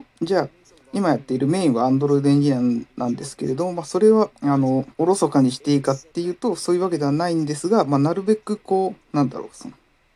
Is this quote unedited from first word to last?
no; 2 cuts; at 4.3 s, 4.9 s

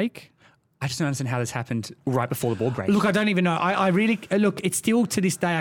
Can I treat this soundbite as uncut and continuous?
no; 1 cut; at 2.0 s

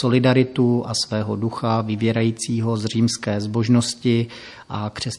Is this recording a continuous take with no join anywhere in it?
yes; 0 cuts

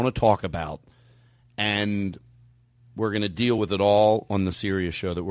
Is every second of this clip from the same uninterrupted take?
yes; 0 cuts

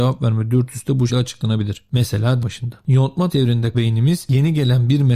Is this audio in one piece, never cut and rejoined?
no; 4 cuts; at 1.1 s, 2.4 s, 3.3 s, 3.7 s

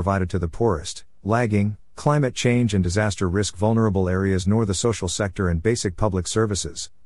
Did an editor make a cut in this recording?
no; 0 cuts

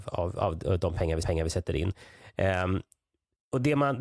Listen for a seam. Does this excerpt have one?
yes; 1 cut; at 1.2 s

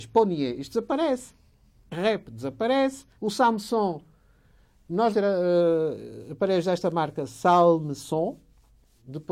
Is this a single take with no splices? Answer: no; 2 cuts; at 3.1 s, 5.1 s

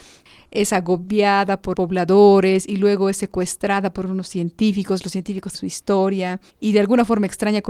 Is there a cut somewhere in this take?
yes; 3 cuts; at 1.7 s, 5.5 s, 6.5 s

